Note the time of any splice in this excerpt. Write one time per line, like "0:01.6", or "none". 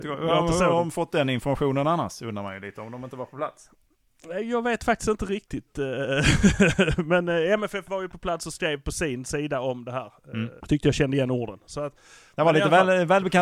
0:10.6

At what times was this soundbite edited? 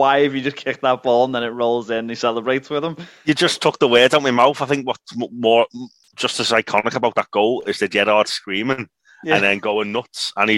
none

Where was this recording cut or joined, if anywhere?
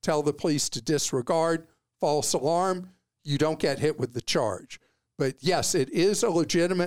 none

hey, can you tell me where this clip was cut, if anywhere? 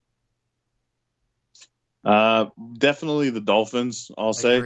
none

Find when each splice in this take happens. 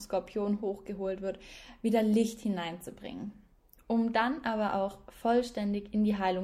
none

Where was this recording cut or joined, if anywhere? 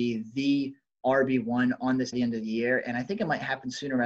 0:02.1

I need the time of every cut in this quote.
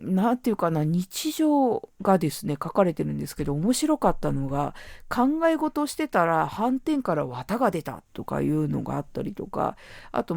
0:01.9

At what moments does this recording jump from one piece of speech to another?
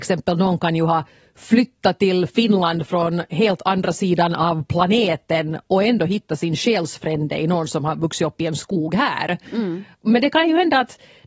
none

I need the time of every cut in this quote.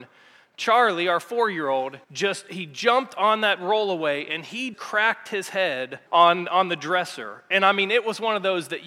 0:02.0
0:04.7
0:06.1

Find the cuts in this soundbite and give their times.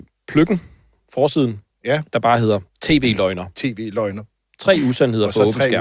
none

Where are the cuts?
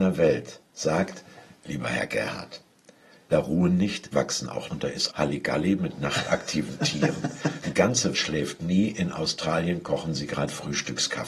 0:03.3
0:04.1
0:04.7
0:05.1
0:07.6
0:08.1

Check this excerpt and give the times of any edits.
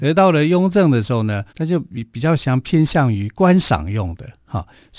0:01.5

